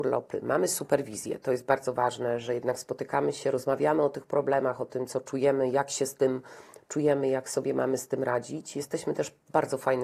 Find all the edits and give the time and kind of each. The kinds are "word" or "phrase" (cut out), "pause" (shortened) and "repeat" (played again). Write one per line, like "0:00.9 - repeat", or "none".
none